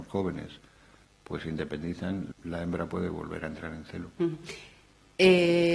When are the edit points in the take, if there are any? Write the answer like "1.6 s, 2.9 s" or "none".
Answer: 2.3 s